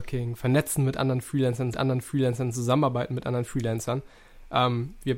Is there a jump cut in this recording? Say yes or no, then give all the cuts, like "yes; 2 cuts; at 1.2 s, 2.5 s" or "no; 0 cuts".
yes; 1 cut; at 1.7 s